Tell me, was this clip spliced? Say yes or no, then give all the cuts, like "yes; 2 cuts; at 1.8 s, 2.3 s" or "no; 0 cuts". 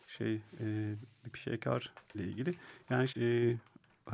yes; 3 cuts; at 1.3 s, 2.1 s, 3.1 s